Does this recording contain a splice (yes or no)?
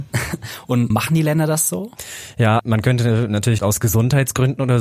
yes